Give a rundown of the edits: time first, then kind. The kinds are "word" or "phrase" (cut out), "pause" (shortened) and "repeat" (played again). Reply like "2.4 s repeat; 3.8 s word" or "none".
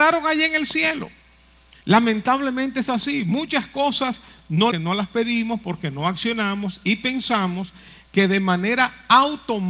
1.8 s pause; 4.7 s phrase